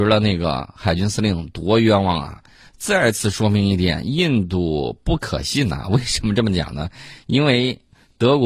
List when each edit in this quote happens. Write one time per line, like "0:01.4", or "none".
none